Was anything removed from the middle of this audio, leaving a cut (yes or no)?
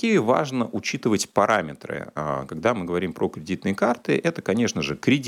no